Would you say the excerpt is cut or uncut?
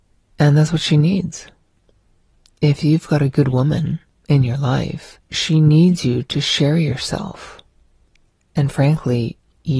cut